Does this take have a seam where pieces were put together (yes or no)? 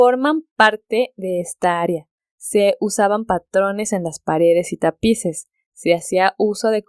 no